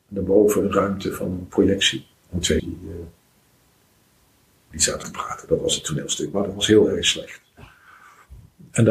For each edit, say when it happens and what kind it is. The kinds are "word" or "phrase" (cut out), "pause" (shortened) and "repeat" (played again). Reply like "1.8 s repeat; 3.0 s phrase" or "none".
2.2 s pause; 2.6 s word; 4.7 s word; 5.0 s word